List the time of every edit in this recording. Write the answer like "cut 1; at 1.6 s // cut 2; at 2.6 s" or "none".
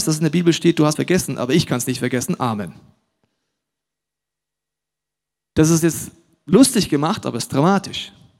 cut 1; at 0.9 s